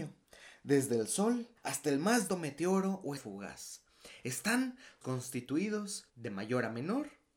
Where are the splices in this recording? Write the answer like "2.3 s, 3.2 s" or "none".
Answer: 1.6 s, 2.3 s, 3.2 s, 5.0 s, 6.1 s